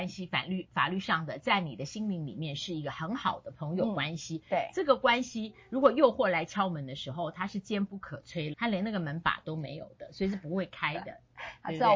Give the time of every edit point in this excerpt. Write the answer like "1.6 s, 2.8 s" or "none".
8.5 s